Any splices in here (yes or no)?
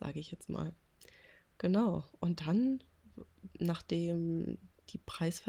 yes